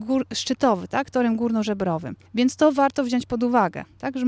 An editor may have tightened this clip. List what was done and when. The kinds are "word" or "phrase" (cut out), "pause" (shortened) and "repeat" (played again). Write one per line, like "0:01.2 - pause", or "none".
0:02.3 - pause